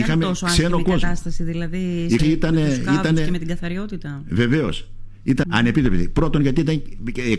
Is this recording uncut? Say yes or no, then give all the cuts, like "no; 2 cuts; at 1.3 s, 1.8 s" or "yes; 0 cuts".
no; 2 cuts; at 2.2 s, 5.4 s